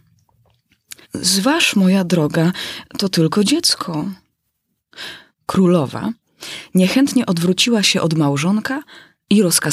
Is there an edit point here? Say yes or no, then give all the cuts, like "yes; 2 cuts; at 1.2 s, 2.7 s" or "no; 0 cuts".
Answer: yes; 1 cut; at 1.0 s